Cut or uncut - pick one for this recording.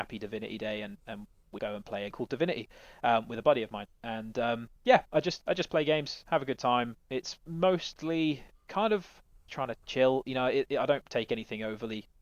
cut